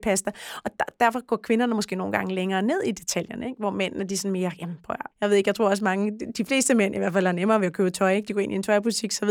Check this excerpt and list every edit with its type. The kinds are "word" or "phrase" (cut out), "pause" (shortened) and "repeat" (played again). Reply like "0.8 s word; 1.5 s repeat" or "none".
5.1 s pause